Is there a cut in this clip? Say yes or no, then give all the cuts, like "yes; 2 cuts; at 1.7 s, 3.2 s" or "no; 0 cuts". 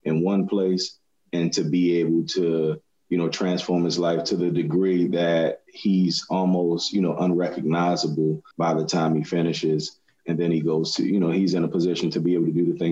yes; 1 cut; at 8.5 s